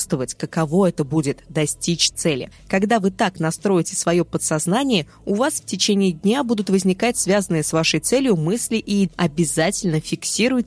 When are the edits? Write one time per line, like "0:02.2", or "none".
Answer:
0:09.1